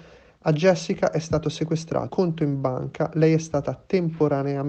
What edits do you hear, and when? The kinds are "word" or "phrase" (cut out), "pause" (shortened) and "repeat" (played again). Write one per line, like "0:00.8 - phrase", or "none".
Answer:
0:02.1 - word

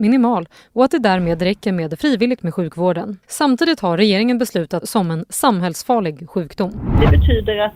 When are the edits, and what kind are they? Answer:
0:02.4 - word
0:03.2 - pause
0:04.8 - phrase

